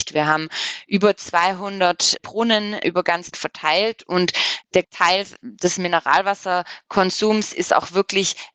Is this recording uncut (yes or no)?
no